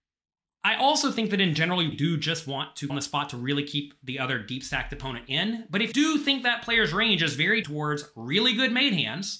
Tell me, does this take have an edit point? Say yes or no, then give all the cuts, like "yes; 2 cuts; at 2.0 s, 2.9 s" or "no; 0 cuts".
yes; 4 cuts; at 1.9 s, 2.9 s, 5.9 s, 7.6 s